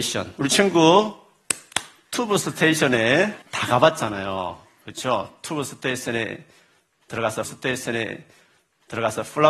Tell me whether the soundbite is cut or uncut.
cut